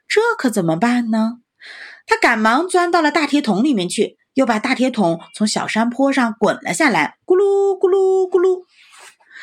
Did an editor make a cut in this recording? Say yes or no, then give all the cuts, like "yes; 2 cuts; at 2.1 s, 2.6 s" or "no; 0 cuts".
yes; 2 cuts; at 4.3 s, 7.2 s